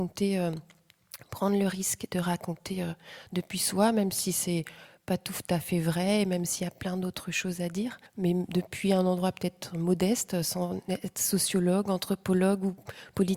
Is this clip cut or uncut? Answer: cut